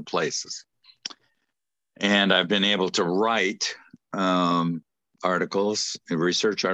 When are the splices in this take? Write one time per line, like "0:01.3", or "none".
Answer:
none